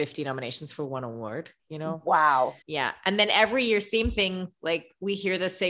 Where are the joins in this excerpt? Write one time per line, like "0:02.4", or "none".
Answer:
0:01.6
0:02.6